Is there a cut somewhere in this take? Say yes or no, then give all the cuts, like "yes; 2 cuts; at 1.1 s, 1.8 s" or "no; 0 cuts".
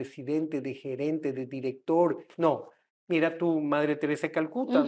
no; 0 cuts